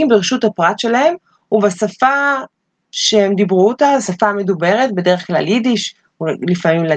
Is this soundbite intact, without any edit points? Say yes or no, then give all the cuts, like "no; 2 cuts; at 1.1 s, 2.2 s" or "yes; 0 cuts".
yes; 0 cuts